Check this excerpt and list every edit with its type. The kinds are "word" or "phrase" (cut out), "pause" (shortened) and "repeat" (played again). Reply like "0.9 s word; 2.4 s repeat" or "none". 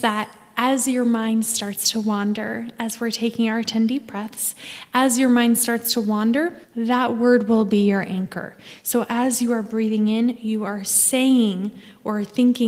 6.6 s pause